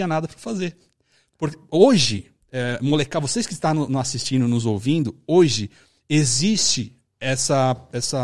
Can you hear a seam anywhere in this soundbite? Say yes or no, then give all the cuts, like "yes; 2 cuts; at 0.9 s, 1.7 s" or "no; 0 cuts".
no; 0 cuts